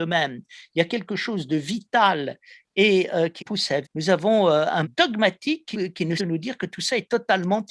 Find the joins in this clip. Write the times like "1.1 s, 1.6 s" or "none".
3.4 s, 3.8 s, 4.8 s, 5.7 s, 6.2 s